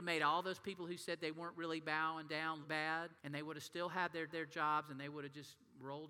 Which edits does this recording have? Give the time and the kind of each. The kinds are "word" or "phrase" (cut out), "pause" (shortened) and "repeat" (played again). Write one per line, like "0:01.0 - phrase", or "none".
0:02.6 - word
0:03.2 - pause
0:04.3 - repeat